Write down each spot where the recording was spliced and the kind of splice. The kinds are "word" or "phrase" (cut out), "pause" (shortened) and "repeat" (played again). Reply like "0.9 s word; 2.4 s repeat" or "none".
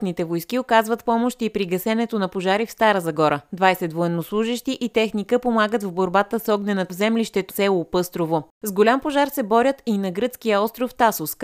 6.9 s word; 7.5 s word; 8.5 s pause